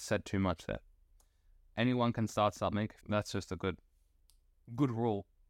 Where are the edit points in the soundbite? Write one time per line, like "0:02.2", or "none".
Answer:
0:03.0